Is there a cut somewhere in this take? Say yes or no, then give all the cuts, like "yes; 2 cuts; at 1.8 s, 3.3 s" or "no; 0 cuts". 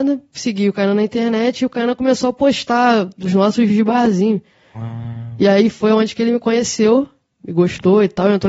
yes; 1 cut; at 3.7 s